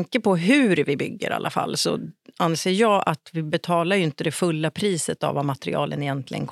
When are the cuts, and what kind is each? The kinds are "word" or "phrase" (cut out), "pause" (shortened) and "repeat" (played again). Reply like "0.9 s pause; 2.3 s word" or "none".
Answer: none